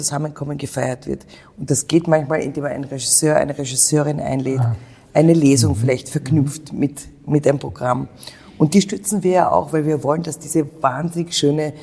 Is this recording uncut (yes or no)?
yes